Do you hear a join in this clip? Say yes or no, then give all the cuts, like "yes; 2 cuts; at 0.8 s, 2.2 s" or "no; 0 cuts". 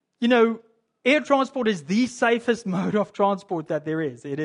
no; 0 cuts